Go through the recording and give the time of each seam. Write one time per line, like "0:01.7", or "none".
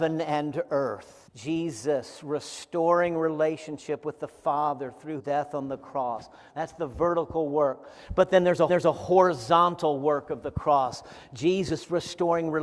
0:01.3
0:05.2
0:08.7